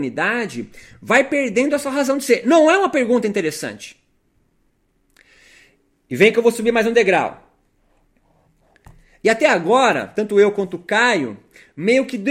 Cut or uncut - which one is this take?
uncut